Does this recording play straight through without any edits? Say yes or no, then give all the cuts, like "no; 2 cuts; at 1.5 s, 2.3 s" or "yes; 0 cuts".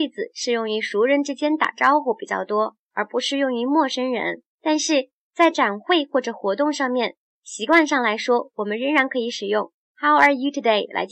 no; 1 cut; at 4.5 s